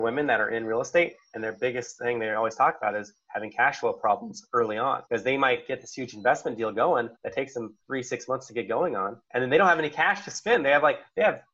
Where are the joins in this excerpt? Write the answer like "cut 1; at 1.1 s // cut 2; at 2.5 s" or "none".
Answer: cut 1; at 5.1 s // cut 2; at 7.2 s // cut 3; at 7.8 s // cut 4; at 9.2 s